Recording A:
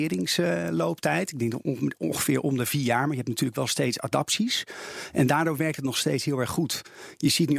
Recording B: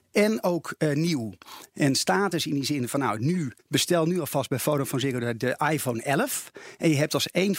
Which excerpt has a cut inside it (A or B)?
B